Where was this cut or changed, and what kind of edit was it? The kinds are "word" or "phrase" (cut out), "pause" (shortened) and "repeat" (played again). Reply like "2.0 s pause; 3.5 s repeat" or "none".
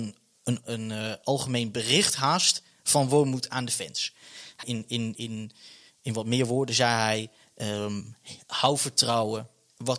4.6 s word; 5.1 s word